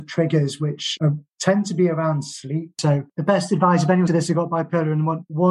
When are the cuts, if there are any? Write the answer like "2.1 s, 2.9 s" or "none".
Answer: 4.1 s